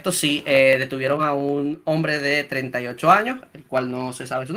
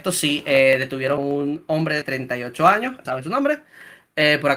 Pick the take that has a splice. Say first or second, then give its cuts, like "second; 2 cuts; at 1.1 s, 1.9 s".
second; 3 cuts; at 1.2 s, 2.0 s, 3.1 s